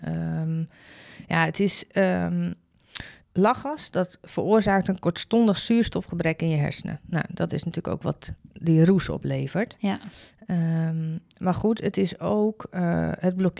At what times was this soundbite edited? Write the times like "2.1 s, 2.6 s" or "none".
3.2 s